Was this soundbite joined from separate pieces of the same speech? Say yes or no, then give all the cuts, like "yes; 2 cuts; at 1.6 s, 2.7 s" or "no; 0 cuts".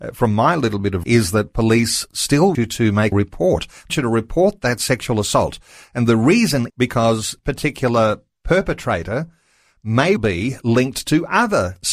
yes; 7 cuts; at 1.0 s, 2.5 s, 3.1 s, 3.9 s, 6.7 s, 7.4 s, 10.2 s